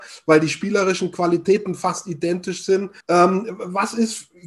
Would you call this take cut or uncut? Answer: cut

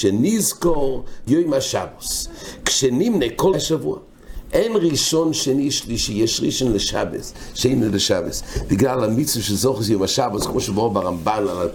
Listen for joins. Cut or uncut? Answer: cut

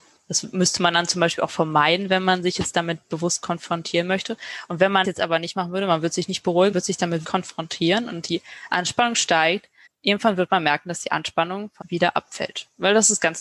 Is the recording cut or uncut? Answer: cut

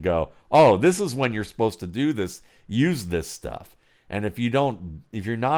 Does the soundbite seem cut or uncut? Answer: uncut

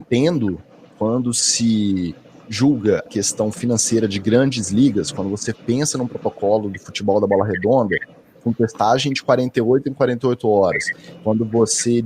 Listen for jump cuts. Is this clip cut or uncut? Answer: cut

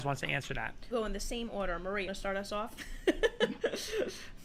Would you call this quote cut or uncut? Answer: cut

